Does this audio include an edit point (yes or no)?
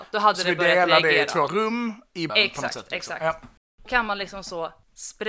yes